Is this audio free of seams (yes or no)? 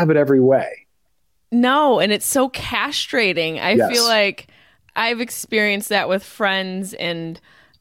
yes